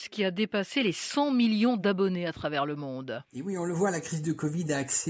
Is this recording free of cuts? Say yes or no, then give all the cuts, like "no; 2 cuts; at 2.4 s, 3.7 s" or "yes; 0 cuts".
yes; 0 cuts